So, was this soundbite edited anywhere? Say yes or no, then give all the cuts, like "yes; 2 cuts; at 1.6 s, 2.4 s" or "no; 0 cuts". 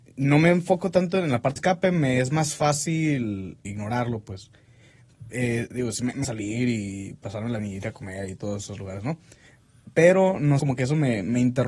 yes; 5 cuts; at 1.6 s, 3.6 s, 6.2 s, 7.6 s, 10.6 s